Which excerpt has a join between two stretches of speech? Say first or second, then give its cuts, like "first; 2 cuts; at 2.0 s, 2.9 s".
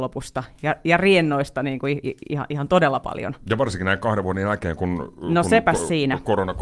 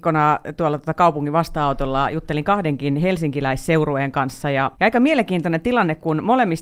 second; 1 cut; at 4.7 s